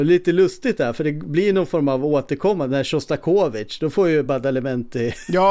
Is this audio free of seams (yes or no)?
yes